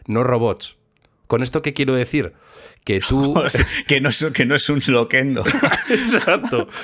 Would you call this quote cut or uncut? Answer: uncut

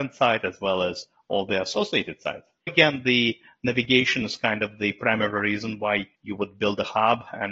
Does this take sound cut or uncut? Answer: cut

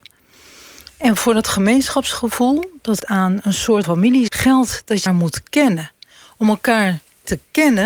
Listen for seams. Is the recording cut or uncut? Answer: cut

